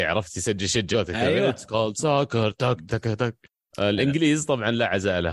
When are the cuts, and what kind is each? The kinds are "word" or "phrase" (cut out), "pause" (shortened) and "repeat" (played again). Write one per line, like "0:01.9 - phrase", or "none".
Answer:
0:00.9 - word
0:02.9 - word
0:03.4 - pause